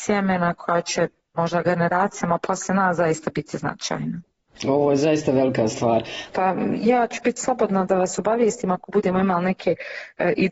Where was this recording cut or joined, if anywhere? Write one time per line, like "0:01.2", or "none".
none